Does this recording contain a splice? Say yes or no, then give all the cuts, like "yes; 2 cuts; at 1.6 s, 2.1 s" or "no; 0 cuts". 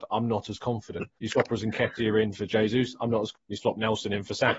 yes; 2 cuts; at 1.2 s, 3.3 s